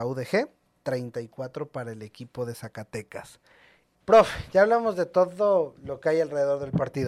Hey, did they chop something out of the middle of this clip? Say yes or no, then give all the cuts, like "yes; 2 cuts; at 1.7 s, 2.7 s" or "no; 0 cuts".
no; 0 cuts